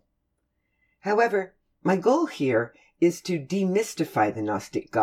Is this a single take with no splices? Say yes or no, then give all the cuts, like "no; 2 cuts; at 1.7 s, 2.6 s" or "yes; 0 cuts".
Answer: yes; 0 cuts